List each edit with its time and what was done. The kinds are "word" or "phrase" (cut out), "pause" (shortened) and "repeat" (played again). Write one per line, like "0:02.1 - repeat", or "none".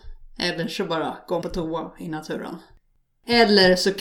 0:01.4 - word